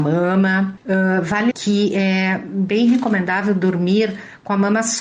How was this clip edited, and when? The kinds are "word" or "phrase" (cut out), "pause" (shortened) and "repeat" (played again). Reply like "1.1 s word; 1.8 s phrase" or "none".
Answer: 1.5 s word